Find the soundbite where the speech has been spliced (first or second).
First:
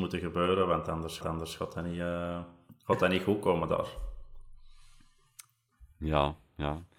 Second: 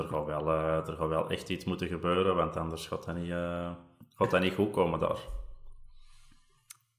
first